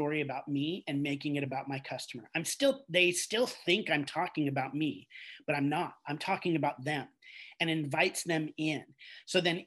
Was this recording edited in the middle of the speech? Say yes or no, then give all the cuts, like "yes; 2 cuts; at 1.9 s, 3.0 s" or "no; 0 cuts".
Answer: no; 0 cuts